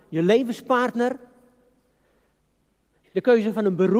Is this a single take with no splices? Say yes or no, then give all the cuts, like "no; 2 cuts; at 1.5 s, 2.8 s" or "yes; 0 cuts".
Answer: yes; 0 cuts